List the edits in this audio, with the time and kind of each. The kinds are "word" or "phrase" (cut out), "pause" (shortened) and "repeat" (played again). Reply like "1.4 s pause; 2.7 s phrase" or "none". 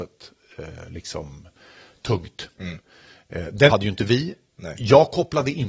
3.7 s word